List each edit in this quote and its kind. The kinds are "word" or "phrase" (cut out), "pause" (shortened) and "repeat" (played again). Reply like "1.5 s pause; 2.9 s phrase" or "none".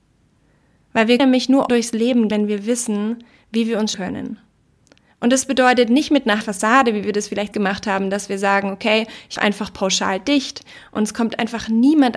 1.2 s word; 1.7 s word; 2.3 s word; 3.9 s word; 6.4 s word; 7.5 s word; 9.4 s word